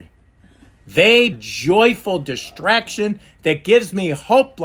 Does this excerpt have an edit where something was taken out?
yes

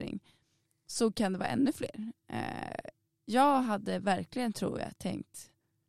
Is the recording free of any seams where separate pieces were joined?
yes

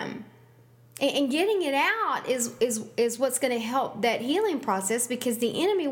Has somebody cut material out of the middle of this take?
no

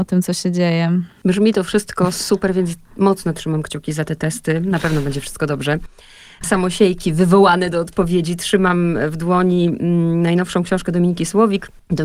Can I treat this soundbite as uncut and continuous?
yes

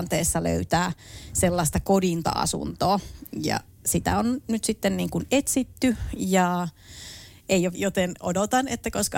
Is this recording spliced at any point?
yes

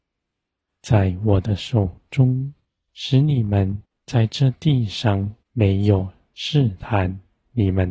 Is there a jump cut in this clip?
yes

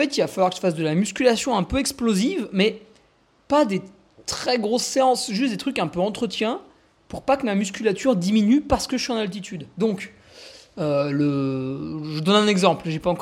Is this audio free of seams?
yes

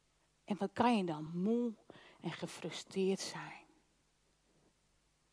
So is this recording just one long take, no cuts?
yes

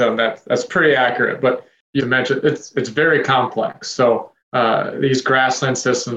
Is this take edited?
yes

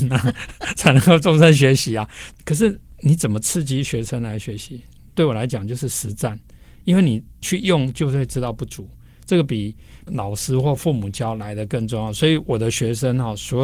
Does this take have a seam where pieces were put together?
no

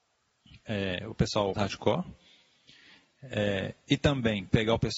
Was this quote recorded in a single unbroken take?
no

